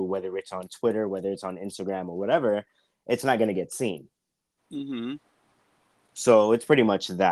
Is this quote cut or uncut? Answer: uncut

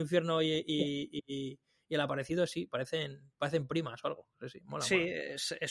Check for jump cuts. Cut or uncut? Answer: uncut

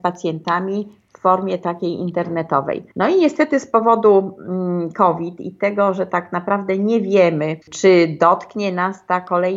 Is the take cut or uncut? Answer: cut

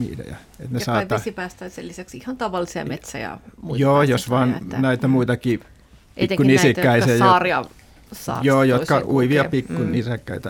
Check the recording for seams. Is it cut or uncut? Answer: uncut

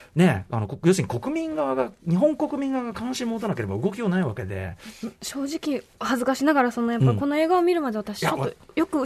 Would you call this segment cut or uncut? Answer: cut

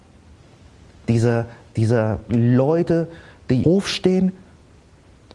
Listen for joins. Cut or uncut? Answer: cut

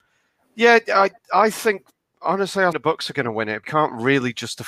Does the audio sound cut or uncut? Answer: cut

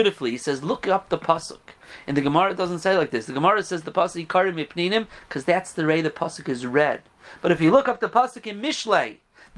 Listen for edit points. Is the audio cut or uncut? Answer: uncut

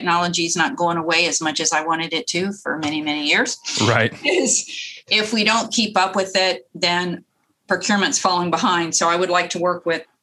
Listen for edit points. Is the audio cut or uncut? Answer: uncut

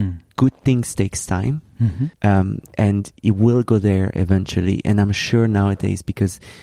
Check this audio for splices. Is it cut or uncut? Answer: cut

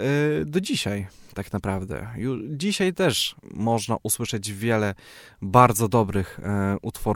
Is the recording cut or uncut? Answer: cut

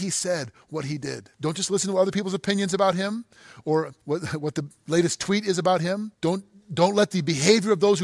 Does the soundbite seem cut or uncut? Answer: cut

